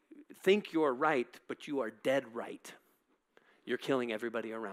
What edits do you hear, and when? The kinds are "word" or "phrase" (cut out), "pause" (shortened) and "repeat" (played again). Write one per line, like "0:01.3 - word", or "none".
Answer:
none